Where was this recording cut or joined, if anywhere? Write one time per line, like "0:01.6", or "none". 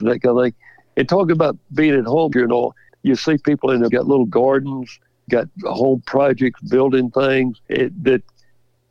0:02.3
0:02.9
0:03.9
0:05.3
0:07.6